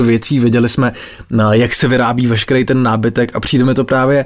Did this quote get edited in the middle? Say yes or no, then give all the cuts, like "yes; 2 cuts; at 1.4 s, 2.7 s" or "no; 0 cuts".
no; 0 cuts